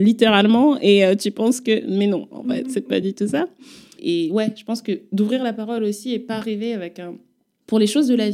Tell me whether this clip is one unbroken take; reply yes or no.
yes